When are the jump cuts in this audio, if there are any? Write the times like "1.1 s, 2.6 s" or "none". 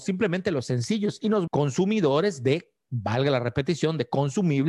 1.5 s